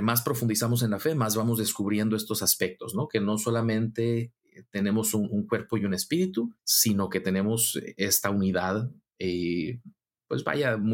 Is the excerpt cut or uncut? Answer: cut